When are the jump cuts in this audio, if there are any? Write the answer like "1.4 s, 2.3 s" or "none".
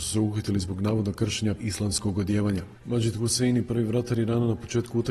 1.6 s

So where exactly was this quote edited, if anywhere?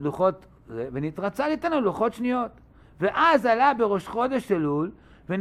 none

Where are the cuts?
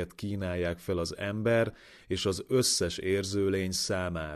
none

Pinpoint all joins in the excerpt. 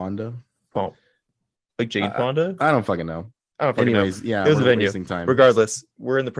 none

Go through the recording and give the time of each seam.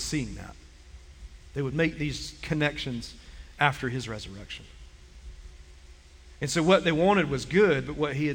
none

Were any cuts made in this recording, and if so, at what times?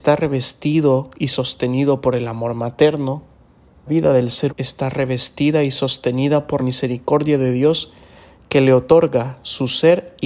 3.9 s, 4.5 s, 6.6 s

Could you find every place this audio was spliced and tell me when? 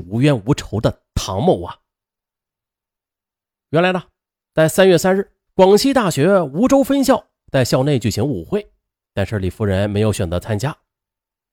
5.5 s, 8.9 s

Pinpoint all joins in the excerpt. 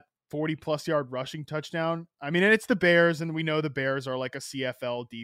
2.1 s

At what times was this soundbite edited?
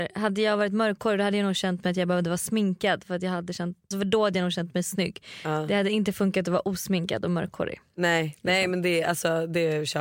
3.9 s

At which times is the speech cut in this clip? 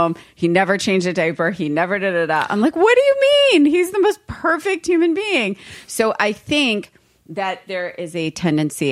none

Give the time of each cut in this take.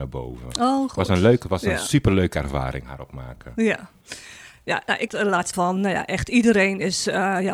5.1 s, 5.5 s

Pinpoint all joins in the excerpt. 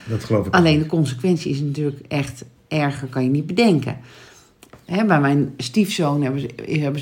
none

